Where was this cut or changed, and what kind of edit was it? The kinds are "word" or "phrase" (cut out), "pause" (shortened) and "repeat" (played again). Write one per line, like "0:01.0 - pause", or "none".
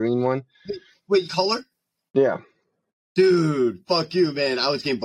0:01.2 - phrase